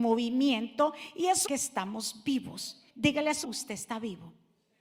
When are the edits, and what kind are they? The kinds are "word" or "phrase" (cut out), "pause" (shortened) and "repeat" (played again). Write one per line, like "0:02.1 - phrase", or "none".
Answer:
0:01.5 - word
0:02.9 - pause
0:03.4 - word